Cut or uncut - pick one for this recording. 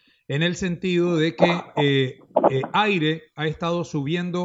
uncut